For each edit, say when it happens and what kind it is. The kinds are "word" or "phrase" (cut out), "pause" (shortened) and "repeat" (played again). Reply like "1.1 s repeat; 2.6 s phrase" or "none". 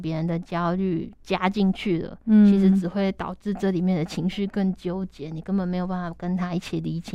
1.2 s pause